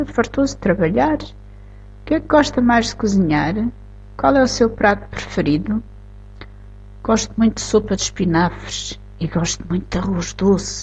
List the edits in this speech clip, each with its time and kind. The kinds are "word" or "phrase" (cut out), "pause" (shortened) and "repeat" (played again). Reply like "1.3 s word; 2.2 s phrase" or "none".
none